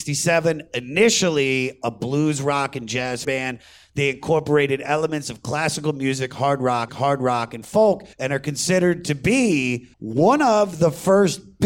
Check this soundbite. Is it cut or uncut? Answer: cut